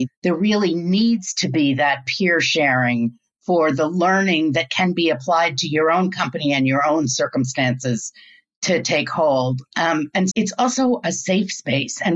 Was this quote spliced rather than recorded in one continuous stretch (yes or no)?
yes